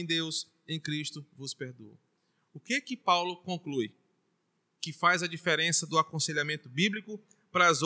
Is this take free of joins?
yes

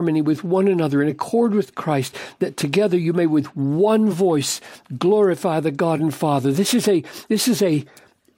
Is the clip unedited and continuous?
yes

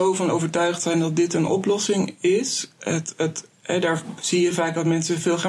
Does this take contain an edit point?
no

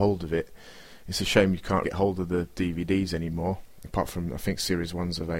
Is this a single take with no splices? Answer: no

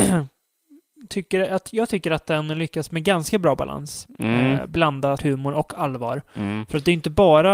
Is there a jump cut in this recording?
yes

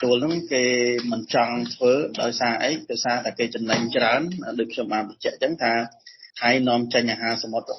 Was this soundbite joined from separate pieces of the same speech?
yes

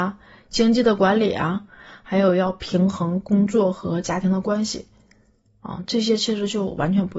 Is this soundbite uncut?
yes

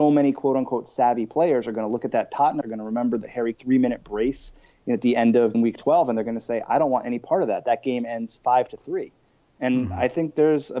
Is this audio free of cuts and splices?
no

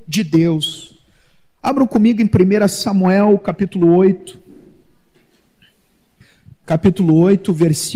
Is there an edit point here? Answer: no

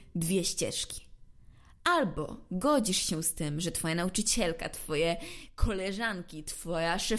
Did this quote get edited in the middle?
no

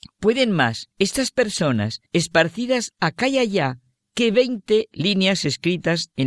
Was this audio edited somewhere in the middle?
yes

